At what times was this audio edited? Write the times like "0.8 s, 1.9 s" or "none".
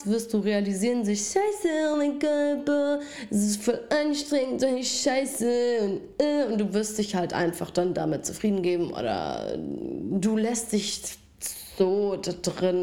none